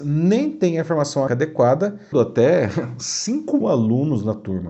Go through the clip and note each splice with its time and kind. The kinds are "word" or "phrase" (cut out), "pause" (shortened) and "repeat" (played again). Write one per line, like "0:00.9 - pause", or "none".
0:01.3 - word
0:02.1 - word
0:03.6 - word